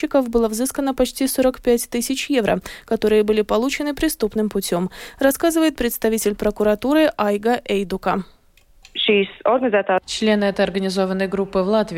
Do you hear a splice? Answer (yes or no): no